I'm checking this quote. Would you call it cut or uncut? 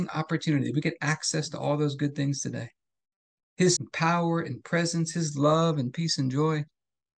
cut